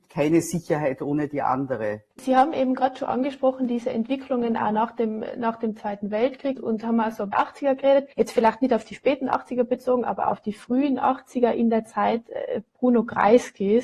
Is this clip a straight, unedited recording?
no; 4 cuts; at 2.1 s, 6.6 s, 7.3 s, 8.1 s

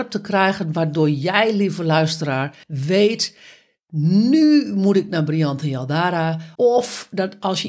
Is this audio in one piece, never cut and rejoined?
no; 2 cuts; at 2.6 s, 6.6 s

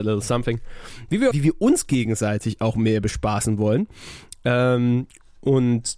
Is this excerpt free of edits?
no; 1 cut; at 1.3 s

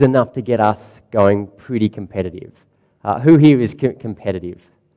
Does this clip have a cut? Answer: no; 0 cuts

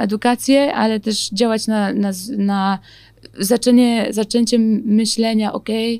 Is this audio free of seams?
yes; 0 cuts

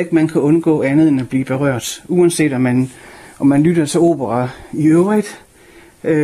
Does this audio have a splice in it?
no; 0 cuts

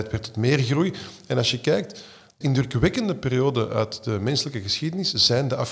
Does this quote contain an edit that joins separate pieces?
yes; 1 cut; at 2.4 s

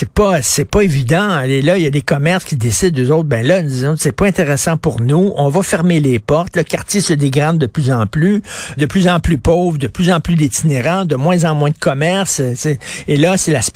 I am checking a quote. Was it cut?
yes; 2 cuts; at 6.5 s, 8.8 s

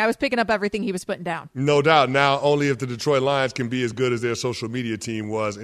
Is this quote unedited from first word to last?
yes; 0 cuts

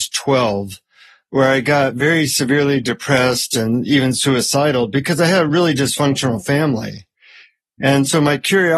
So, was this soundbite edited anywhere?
no; 0 cuts

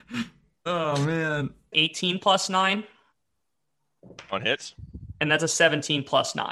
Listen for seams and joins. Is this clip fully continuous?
no; 1 cut; at 1.7 s

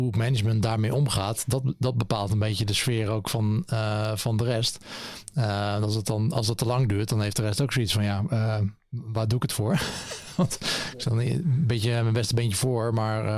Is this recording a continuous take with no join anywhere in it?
yes; 0 cuts

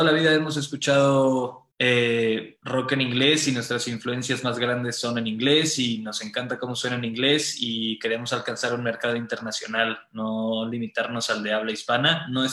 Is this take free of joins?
no; 1 cut; at 1.7 s

